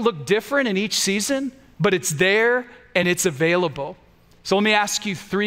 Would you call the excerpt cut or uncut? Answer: uncut